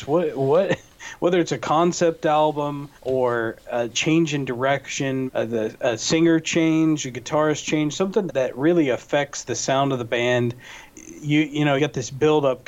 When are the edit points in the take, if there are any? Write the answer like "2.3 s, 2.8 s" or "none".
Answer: 3.0 s, 5.3 s, 8.3 s, 11.8 s